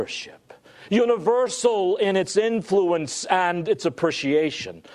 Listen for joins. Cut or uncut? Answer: uncut